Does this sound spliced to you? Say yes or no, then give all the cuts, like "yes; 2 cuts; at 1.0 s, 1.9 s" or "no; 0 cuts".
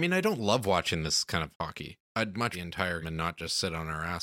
yes; 3 cuts; at 2.1 s, 2.5 s, 3.0 s